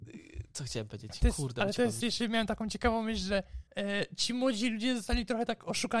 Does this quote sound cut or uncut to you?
cut